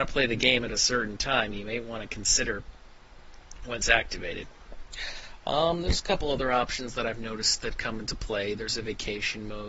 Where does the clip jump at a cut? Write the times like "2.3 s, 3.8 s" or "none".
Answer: 3.8 s